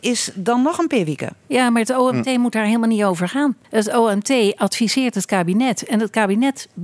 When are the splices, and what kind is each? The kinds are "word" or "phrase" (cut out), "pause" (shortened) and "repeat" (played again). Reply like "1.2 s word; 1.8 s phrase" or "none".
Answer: 3.6 s pause